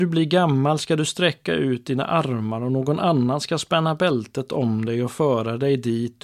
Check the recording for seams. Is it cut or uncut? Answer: uncut